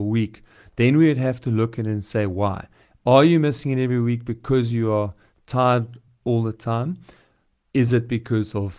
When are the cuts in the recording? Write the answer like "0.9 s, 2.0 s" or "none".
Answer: none